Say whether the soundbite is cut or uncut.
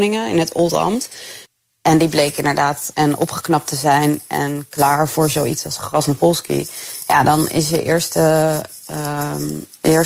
cut